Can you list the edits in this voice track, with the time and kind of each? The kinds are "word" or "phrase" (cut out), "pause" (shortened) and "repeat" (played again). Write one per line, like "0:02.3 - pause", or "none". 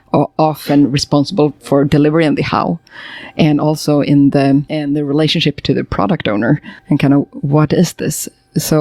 0:06.8 - pause

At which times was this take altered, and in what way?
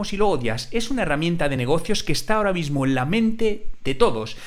none

